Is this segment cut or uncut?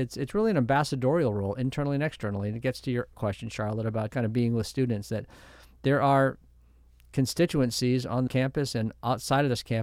cut